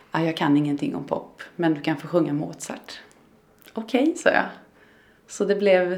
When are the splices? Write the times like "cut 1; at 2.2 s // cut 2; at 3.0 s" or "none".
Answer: none